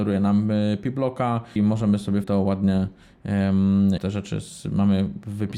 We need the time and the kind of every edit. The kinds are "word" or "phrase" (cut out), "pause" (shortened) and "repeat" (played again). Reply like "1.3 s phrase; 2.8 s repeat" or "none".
1.6 s word; 2.2 s word; 4.0 s word

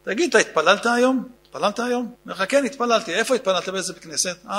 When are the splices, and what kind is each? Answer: 1.4 s pause; 2.1 s pause

